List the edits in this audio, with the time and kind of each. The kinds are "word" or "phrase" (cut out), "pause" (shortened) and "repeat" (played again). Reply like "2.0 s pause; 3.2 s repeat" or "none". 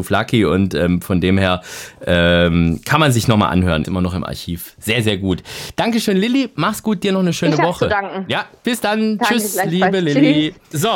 3.8 s word